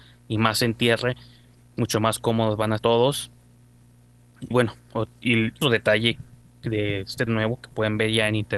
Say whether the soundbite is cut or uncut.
cut